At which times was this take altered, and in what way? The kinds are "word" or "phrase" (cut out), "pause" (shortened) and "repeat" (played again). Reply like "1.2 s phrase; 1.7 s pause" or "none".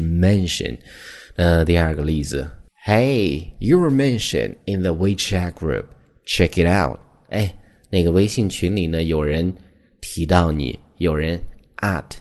none